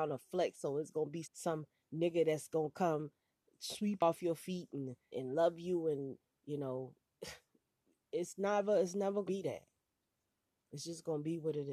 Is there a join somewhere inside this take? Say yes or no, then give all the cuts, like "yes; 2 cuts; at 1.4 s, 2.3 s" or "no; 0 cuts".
yes; 4 cuts; at 1.2 s, 4.0 s, 5.1 s, 9.3 s